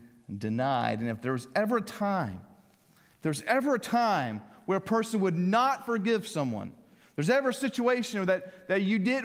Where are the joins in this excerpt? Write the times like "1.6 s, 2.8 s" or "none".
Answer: none